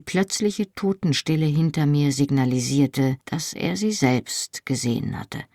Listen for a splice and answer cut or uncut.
cut